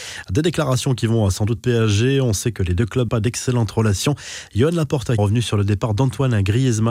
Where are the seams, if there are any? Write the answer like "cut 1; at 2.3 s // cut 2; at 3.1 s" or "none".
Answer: cut 1; at 1.6 s // cut 2; at 3.1 s // cut 3; at 5.2 s